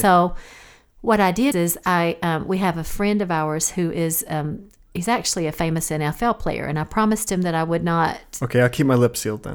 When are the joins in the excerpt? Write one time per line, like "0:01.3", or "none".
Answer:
0:01.5